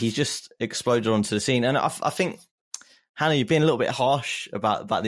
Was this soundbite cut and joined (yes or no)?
no